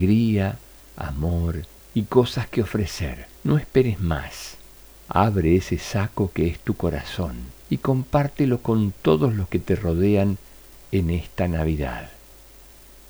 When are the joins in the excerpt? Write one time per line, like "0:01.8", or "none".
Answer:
0:01.8
0:03.4
0:04.8
0:07.6